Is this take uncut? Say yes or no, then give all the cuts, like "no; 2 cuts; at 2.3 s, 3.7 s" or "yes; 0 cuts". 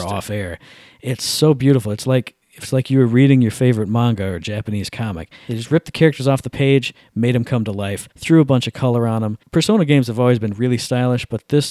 no; 3 cuts; at 2.4 s, 8.1 s, 9.4 s